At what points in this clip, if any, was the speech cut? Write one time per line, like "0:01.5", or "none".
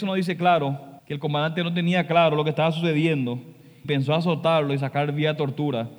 0:01.0
0:03.8